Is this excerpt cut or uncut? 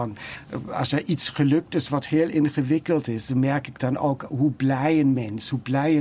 uncut